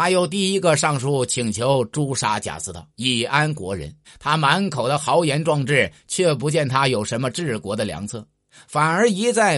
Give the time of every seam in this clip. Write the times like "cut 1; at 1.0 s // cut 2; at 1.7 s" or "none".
cut 1; at 2.9 s // cut 2; at 4.0 s